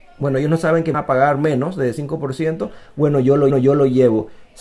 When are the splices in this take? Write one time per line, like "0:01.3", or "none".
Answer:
0:00.9
0:03.5